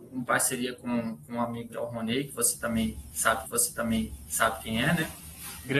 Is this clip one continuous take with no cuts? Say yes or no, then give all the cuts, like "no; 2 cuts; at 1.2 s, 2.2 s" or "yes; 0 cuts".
no; 2 cuts; at 1.7 s, 3.4 s